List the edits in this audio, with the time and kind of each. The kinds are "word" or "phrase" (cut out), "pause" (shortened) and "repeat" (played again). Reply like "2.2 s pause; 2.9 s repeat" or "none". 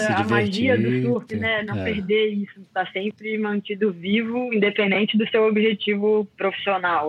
2.5 s word